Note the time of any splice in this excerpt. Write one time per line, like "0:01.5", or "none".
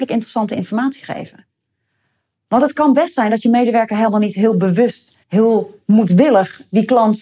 0:05.2